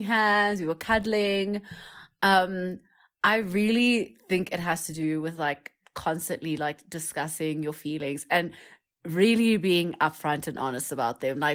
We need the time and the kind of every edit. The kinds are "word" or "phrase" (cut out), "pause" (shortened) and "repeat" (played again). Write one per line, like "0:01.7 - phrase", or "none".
none